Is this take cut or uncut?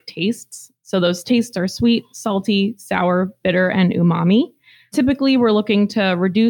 uncut